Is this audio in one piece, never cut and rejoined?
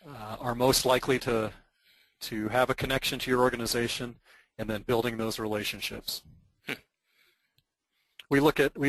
yes; 0 cuts

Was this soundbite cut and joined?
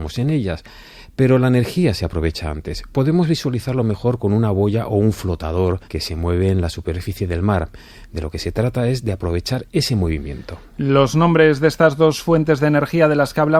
yes; 1 cut; at 5.8 s

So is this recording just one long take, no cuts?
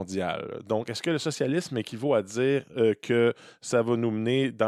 yes; 0 cuts

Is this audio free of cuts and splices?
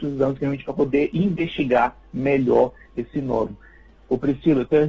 yes; 0 cuts

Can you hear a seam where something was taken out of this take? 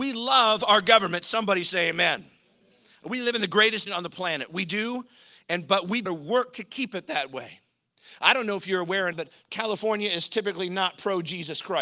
yes; 3 cuts; at 3.9 s, 6.1 s, 9.1 s

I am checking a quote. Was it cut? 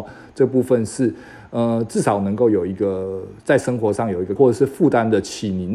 yes; 1 cut; at 4.4 s

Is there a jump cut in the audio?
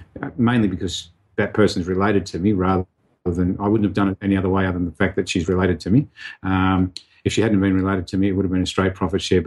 no; 0 cuts

